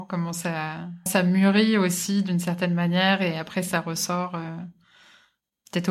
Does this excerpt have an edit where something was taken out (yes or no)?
yes